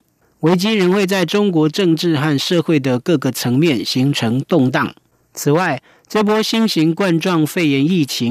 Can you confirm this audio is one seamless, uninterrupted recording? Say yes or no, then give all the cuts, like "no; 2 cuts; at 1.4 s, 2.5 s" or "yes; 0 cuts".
yes; 0 cuts